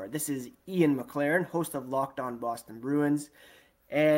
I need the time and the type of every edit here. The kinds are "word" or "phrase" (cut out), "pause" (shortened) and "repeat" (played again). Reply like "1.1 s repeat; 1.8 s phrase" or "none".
none